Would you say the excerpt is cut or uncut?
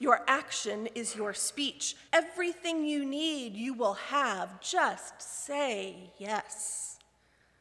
cut